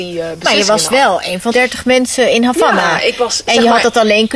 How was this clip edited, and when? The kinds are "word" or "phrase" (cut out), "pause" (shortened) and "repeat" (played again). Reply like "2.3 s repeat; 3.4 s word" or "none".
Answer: 1.5 s word